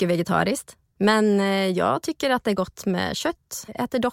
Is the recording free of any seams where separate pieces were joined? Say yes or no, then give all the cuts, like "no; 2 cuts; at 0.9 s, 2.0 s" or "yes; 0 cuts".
yes; 0 cuts